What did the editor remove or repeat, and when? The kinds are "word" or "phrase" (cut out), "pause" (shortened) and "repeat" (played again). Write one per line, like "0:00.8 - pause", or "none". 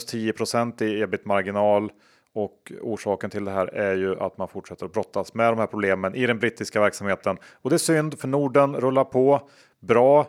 none